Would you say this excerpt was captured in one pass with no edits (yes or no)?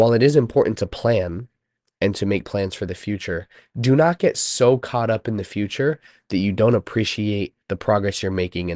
yes